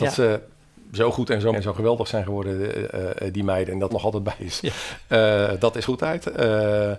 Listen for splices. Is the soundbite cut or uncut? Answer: cut